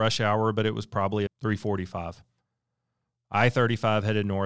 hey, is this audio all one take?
no; 1 cut; at 1.3 s

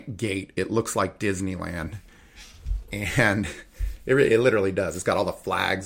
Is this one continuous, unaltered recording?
yes; 0 cuts

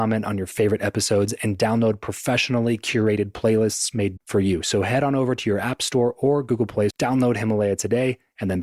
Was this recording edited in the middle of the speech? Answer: yes; 2 cuts; at 4.2 s, 6.9 s

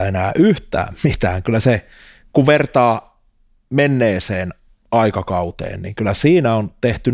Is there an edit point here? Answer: no; 0 cuts

